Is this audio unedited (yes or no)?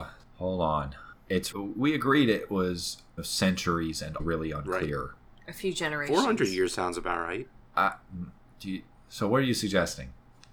no